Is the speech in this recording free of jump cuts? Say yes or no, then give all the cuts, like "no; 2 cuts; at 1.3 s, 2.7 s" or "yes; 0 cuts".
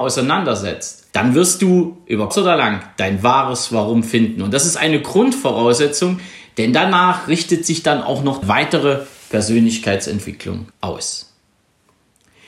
no; 4 cuts; at 1.1 s, 2.3 s, 8.4 s, 10.7 s